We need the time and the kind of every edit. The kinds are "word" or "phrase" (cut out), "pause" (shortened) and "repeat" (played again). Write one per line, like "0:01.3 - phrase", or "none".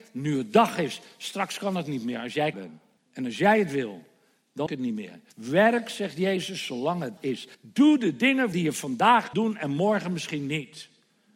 0:02.5 - word
0:03.0 - pause
0:04.7 - word
0:05.3 - pause
0:07.2 - word
0:07.5 - pause
0:08.5 - phrase
0:09.3 - word